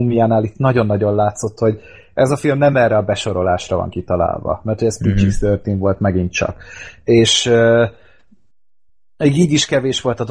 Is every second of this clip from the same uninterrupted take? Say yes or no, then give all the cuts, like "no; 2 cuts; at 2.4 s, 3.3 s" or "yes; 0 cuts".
yes; 0 cuts